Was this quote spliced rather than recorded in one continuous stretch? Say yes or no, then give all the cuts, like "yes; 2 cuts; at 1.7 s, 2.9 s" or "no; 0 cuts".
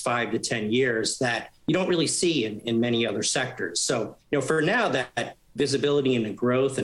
yes; 2 cuts; at 1.6 s, 4.2 s